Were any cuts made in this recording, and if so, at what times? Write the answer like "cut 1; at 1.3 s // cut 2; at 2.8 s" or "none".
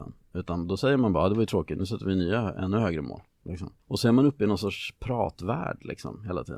cut 1; at 3.8 s